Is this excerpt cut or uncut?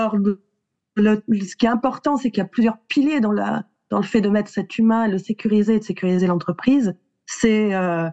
uncut